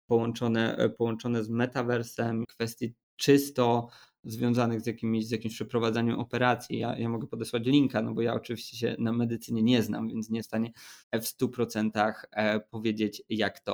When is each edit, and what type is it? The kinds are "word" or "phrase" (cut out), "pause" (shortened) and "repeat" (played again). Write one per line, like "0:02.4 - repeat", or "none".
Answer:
0:02.4 - word
0:03.0 - pause
0:10.4 - word
0:11.0 - pause

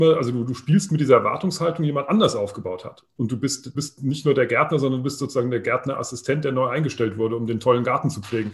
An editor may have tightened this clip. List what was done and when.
0:03.7 - word

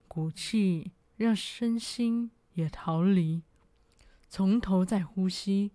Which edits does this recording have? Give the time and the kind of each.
0:03.6 - pause

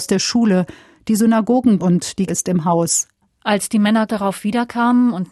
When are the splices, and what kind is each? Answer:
0:01.8 - word
0:02.3 - word
0:04.1 - word

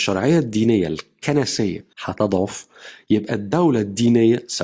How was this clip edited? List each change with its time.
0:01.9 - pause

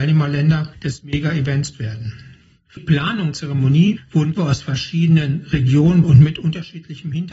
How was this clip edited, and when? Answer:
0:01.7 - word
0:02.8 - word
0:03.3 - word
0:04.4 - word
0:06.0 - word

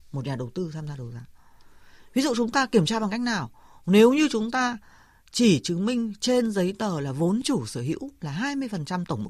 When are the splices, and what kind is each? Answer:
none

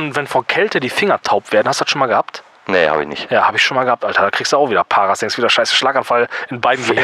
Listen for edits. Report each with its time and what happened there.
none

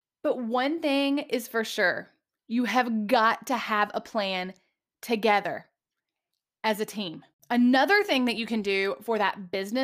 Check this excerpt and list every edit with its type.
none

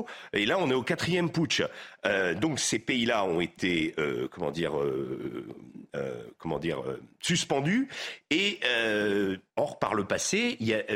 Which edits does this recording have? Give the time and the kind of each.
0:09.5 - pause

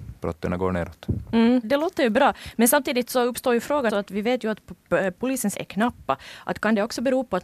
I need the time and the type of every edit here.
0:01.6 - word
0:03.9 - word
0:05.5 - word

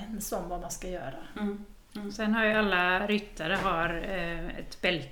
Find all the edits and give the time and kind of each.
none

